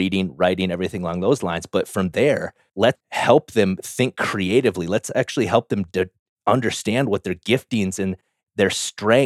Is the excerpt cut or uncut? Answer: cut